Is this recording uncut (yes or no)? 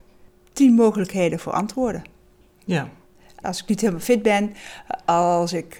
yes